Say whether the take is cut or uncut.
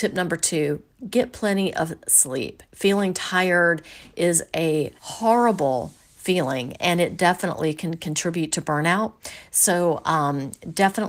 cut